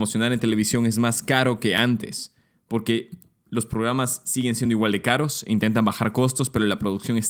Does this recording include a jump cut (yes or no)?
no